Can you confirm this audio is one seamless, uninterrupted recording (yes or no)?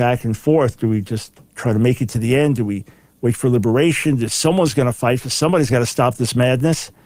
yes